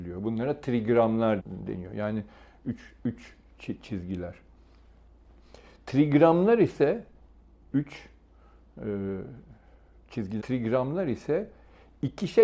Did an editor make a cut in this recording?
yes; 3 cuts; at 1.4 s, 7.7 s, 10.4 s

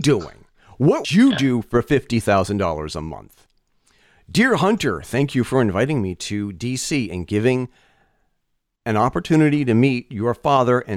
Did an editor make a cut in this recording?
yes; 1 cut; at 1.0 s

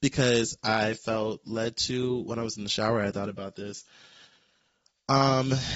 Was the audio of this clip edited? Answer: no; 0 cuts

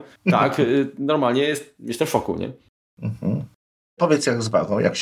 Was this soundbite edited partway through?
no; 0 cuts

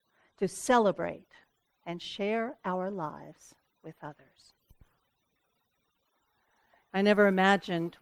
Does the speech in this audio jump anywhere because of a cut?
no; 0 cuts

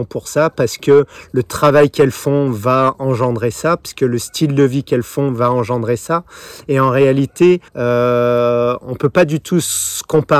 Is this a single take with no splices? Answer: no; 1 cut; at 7.7 s

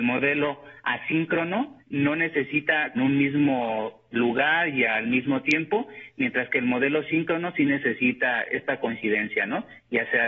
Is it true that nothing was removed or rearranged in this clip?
no; 3 cuts; at 1.8 s, 2.9 s, 4.1 s

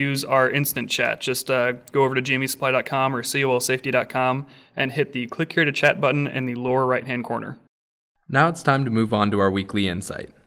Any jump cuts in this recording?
no; 0 cuts

